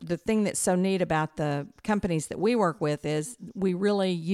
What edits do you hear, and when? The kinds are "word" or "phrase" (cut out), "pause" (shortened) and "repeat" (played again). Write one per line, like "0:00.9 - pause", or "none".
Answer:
none